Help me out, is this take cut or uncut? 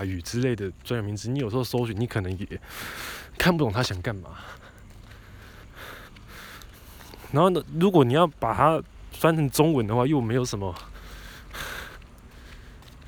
uncut